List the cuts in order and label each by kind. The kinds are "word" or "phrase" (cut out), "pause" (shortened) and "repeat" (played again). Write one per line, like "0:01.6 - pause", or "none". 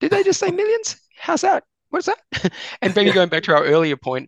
none